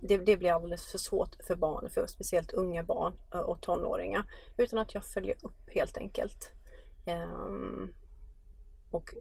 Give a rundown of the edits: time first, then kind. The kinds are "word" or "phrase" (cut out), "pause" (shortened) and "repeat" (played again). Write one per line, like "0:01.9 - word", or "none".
none